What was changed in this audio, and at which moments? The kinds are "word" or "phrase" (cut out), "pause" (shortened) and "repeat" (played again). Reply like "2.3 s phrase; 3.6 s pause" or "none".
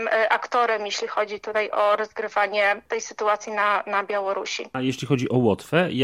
none